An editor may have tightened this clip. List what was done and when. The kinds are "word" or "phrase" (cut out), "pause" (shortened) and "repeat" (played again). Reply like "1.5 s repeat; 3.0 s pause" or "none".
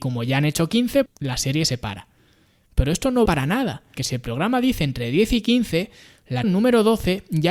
1.1 s word; 3.3 s word; 4.0 s word; 6.4 s word